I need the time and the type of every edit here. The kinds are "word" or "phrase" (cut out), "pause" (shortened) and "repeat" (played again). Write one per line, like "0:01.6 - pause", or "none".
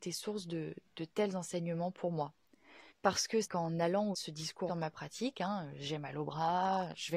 0:02.9 - pause
0:03.4 - phrase
0:04.1 - word
0:04.7 - word